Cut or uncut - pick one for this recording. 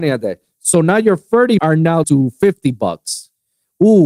cut